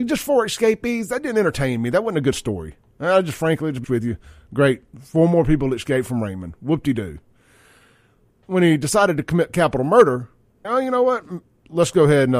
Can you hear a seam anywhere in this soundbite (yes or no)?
yes